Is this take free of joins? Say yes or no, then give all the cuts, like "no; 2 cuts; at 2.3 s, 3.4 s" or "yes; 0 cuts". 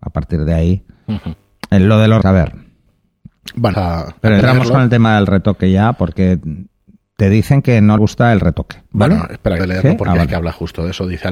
no; 5 cuts; at 2.2 s, 3.7 s, 4.4 s, 8.0 s, 9.6 s